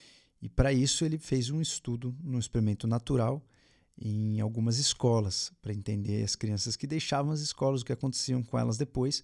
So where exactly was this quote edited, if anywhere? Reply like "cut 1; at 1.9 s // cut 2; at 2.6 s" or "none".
none